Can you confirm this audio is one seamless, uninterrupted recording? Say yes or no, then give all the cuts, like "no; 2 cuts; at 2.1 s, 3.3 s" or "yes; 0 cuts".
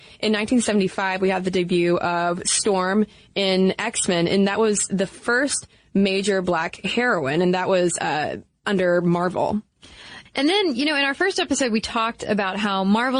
yes; 0 cuts